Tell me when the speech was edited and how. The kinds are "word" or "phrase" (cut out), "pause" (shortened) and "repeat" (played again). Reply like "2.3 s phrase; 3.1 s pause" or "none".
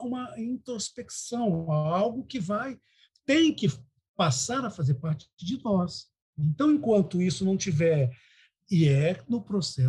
none

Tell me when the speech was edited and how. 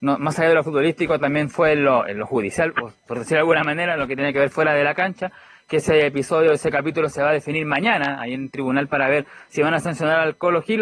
none

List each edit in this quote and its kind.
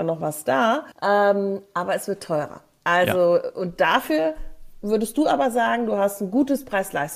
0.9 s pause

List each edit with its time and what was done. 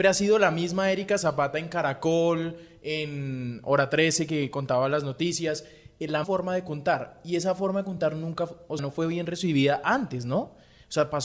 6.2 s word; 8.8 s word

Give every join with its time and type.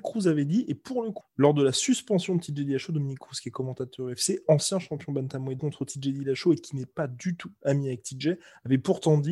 1.2 s phrase; 5.6 s phrase

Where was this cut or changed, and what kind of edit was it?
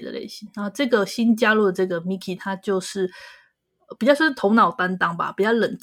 none

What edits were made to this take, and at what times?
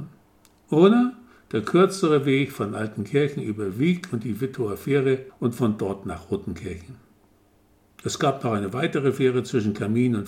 none

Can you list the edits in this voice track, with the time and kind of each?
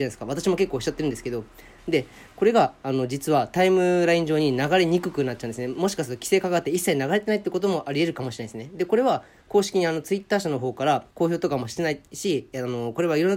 11.1 s pause

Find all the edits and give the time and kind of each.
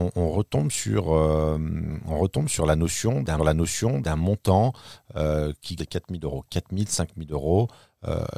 3.4 s repeat; 5.8 s phrase

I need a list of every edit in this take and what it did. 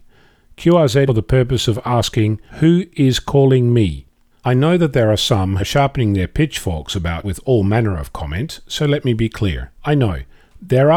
1.1 s phrase; 2.5 s pause; 4.3 s pause; 5.6 s word; 7.2 s word; 9.7 s pause

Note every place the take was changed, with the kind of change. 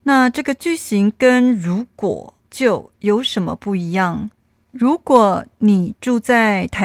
2.4 s pause; 4.4 s pause

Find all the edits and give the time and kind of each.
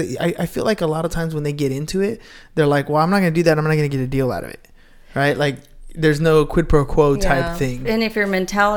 none

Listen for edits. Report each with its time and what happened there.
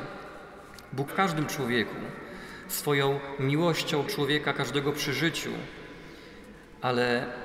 1.1 s word; 4.1 s word

